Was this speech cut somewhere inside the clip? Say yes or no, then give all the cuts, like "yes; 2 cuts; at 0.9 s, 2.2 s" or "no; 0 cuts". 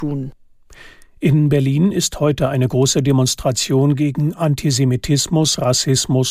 no; 0 cuts